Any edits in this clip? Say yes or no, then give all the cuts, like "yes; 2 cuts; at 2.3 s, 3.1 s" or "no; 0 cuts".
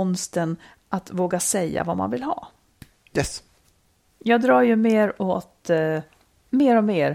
no; 0 cuts